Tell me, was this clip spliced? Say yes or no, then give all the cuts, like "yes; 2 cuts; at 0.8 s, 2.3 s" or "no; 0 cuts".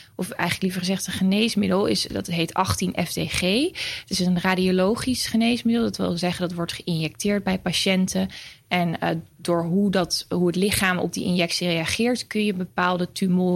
no; 0 cuts